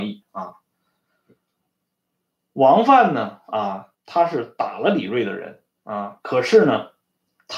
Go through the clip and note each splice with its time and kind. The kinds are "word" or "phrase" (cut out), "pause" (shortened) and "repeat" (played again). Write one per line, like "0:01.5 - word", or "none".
0:03.9 - pause